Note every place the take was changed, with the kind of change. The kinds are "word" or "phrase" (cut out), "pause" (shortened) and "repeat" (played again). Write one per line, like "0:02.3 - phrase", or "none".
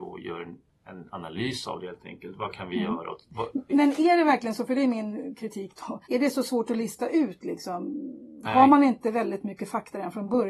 0:03.7 - word
0:06.0 - pause